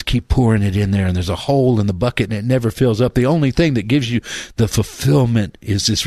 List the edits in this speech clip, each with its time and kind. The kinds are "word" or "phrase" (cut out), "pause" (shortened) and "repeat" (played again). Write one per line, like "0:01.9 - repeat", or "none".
none